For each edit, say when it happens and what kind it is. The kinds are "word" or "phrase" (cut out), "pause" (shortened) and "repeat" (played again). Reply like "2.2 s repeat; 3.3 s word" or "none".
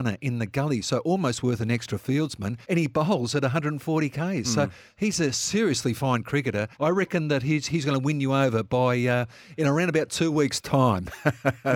2.6 s pause; 6.7 s pause

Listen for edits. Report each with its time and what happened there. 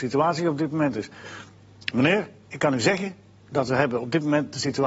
none

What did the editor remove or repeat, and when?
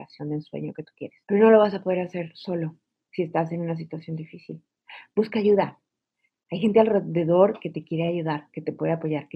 1.2 s pause

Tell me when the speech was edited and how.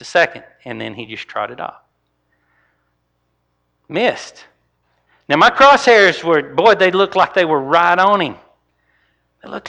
none

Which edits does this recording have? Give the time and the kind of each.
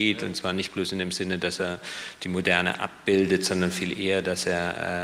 none

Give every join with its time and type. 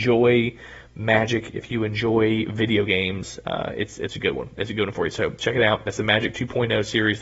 none

